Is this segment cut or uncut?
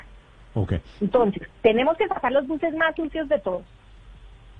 uncut